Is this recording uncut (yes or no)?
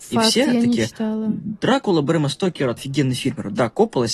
no